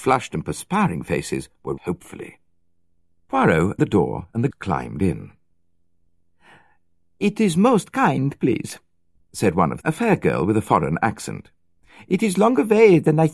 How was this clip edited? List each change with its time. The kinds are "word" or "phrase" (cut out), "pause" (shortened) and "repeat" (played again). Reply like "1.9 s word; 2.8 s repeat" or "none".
1.8 s word; 3.8 s word; 4.5 s word; 9.8 s word